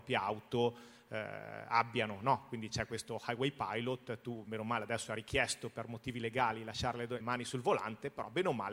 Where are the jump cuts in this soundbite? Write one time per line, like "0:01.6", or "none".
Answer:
0:07.2